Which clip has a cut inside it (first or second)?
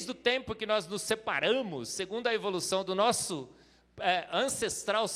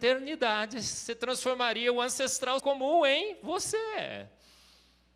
second